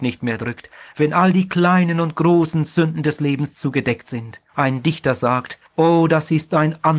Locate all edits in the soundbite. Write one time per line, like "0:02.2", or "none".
0:04.5
0:05.7